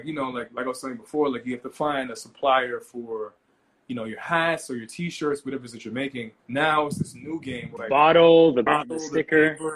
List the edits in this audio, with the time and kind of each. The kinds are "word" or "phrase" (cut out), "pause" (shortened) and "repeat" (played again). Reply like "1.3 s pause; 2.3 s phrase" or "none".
6.4 s pause; 7.8 s word; 8.7 s word